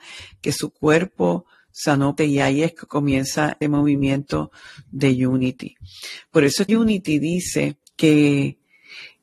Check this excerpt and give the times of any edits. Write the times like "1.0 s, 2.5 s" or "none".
2.2 s, 3.6 s, 6.7 s, 7.9 s

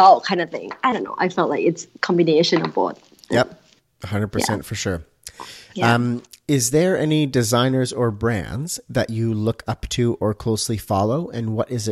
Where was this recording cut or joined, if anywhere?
none

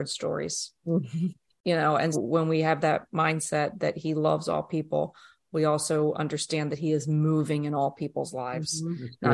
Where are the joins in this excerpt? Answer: 2.1 s

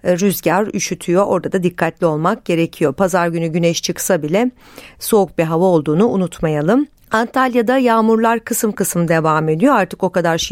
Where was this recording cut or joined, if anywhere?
7.0 s

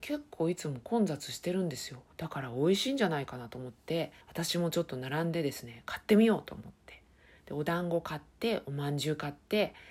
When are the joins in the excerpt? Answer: 2.1 s, 4.2 s

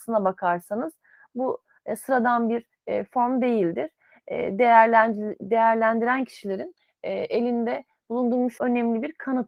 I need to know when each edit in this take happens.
8.6 s

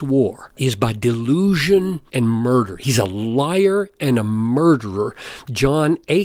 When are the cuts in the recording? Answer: none

